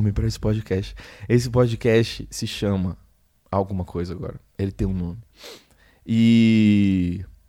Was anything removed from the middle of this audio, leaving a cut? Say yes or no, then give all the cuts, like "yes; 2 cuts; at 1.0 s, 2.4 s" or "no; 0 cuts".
no; 0 cuts